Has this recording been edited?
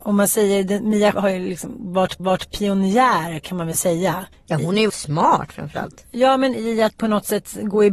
yes; 6 cuts; at 1.1 s, 2.2 s, 4.3 s, 4.9 s, 6.5 s, 7.0 s

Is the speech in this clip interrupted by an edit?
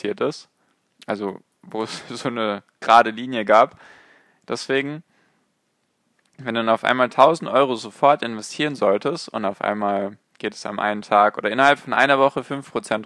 yes; 1 cut; at 10.3 s

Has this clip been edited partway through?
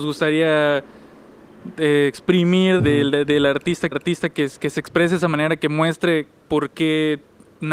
yes; 2 cuts; at 2.8 s, 3.9 s

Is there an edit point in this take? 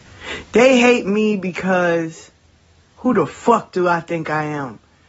no; 0 cuts

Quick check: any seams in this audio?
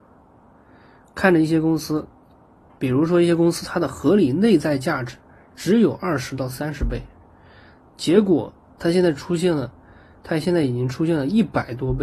no; 0 cuts

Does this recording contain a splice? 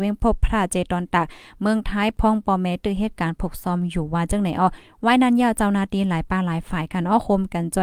no; 0 cuts

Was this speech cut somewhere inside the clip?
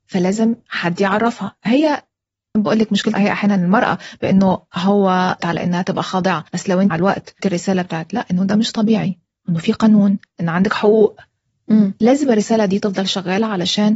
yes; 6 cuts; at 2.6 s, 3.1 s, 5.4 s, 6.5 s, 6.9 s, 7.4 s

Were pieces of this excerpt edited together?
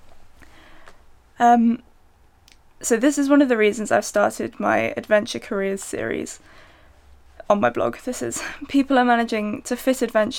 no; 0 cuts

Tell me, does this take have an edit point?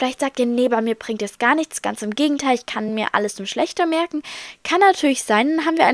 no; 0 cuts

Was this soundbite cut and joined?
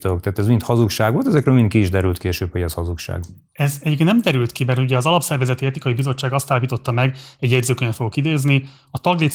no; 0 cuts

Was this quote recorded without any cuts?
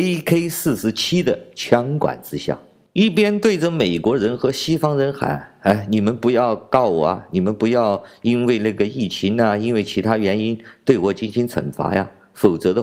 yes; 0 cuts

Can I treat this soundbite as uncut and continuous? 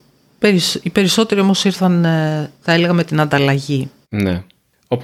no; 2 cuts; at 2.5 s, 4.0 s

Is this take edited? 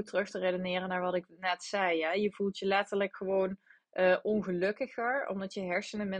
no; 0 cuts

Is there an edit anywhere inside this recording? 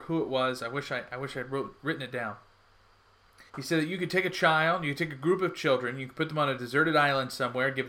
yes; 1 cut; at 3.5 s

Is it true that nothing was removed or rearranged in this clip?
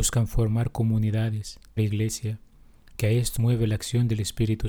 no; 3 cuts; at 1.8 s, 3.0 s, 3.4 s

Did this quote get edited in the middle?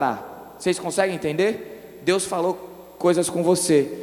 no; 0 cuts

